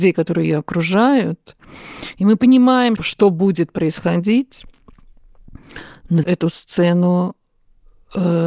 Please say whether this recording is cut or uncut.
cut